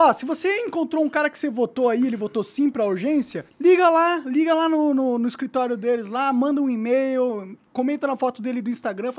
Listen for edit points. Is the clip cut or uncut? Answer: cut